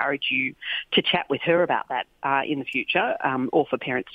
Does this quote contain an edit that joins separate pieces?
no; 0 cuts

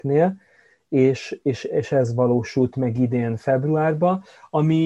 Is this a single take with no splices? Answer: yes; 0 cuts

